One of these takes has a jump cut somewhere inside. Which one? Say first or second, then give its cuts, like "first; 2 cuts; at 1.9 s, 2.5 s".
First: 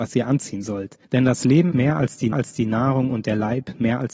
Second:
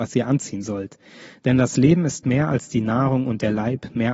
first; 3 cuts; at 1.0 s, 1.7 s, 2.3 s